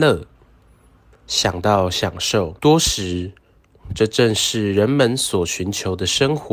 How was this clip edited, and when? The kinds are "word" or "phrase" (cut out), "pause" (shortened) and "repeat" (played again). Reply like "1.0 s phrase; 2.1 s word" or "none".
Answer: 2.6 s pause